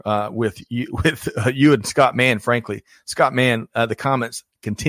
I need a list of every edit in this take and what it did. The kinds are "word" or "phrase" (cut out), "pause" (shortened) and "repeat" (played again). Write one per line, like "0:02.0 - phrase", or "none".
none